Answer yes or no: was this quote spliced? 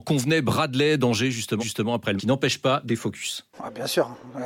yes